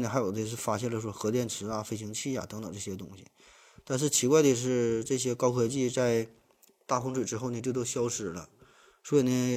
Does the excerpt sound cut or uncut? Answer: uncut